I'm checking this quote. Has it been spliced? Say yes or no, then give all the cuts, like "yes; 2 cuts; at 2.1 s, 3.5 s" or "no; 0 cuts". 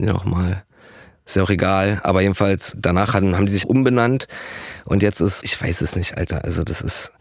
yes; 3 cuts; at 2.7 s, 3.6 s, 5.4 s